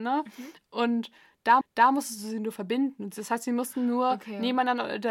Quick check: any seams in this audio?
yes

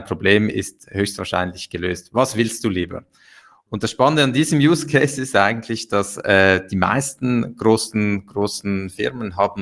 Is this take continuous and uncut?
yes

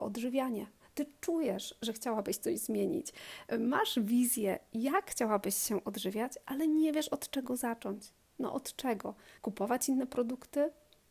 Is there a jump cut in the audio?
yes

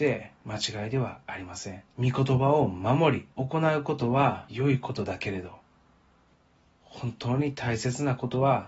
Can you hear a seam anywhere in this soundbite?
yes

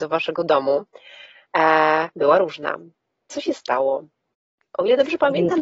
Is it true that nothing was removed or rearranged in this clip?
yes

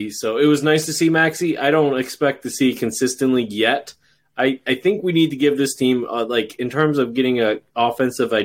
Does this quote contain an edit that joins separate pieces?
no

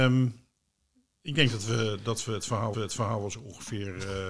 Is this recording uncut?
no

